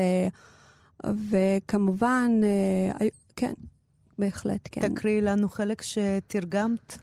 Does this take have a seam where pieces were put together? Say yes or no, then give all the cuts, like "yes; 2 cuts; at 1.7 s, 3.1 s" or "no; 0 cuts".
no; 0 cuts